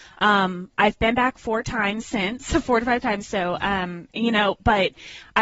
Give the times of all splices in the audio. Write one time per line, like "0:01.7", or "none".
0:04.1